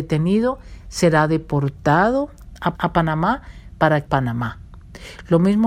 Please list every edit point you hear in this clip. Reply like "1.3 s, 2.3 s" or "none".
2.7 s, 4.1 s